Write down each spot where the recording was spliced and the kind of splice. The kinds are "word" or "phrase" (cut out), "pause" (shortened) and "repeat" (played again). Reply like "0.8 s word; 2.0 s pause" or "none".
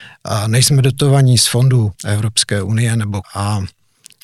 2.0 s pause; 3.2 s word